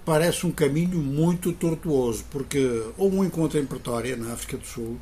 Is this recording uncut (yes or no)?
yes